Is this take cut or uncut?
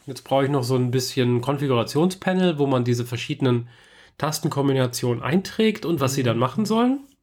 uncut